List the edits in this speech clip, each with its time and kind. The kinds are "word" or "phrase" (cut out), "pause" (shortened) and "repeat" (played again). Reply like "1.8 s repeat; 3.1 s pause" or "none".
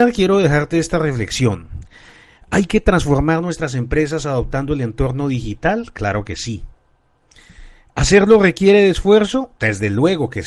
none